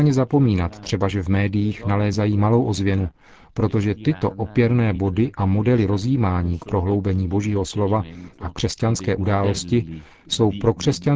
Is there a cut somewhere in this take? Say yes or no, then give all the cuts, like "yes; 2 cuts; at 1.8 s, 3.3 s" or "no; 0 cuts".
no; 0 cuts